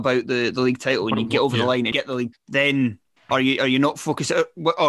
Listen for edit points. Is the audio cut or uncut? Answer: cut